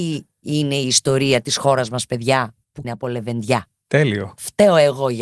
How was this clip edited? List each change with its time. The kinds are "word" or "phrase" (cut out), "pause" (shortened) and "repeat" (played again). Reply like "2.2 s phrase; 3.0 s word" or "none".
2.8 s word